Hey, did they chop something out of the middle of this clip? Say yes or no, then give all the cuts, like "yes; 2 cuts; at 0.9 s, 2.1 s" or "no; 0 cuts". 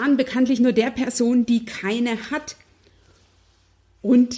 no; 0 cuts